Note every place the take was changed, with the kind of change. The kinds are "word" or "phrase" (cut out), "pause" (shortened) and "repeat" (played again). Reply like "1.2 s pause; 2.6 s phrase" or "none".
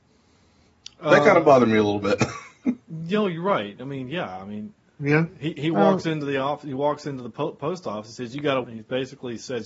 8.6 s word